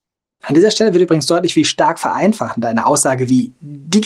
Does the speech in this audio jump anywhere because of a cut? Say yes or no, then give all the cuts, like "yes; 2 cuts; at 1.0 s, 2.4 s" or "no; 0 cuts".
no; 0 cuts